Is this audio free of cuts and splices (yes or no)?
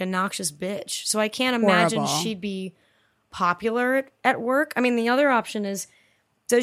yes